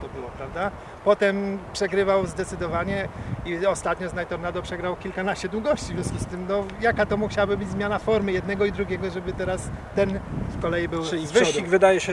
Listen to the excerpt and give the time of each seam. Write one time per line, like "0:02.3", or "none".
none